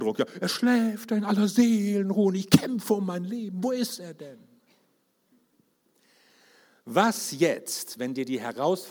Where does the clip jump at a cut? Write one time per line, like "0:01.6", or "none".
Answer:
none